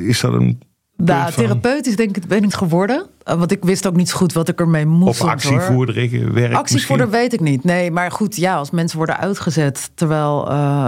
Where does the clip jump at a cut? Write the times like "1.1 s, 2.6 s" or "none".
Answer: 2.5 s